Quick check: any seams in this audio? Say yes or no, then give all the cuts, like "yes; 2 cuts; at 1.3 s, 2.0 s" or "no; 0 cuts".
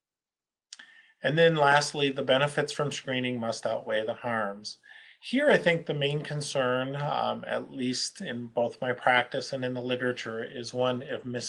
no; 0 cuts